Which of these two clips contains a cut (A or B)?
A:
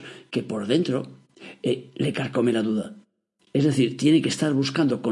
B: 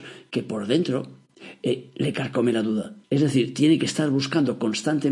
B